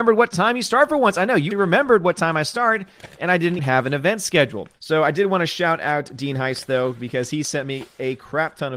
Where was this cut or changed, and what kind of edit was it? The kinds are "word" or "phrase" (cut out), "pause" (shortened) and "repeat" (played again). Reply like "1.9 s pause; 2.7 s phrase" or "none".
1.5 s word; 3.6 s word; 4.7 s pause